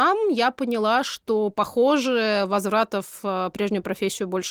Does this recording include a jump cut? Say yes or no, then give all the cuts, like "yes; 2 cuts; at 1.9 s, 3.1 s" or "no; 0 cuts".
no; 0 cuts